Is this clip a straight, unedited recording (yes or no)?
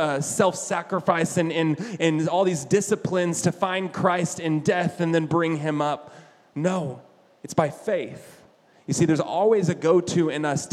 yes